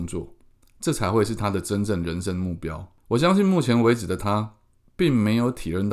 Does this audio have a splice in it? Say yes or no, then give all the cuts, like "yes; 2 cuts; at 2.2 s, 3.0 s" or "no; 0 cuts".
no; 0 cuts